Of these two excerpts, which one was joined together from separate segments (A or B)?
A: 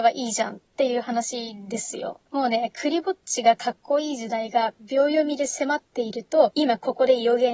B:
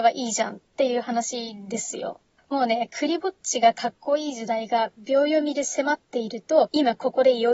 A